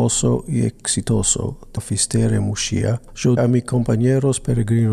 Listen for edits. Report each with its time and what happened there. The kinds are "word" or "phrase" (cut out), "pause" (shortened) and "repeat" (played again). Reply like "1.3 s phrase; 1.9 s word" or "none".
1.8 s word; 3.4 s word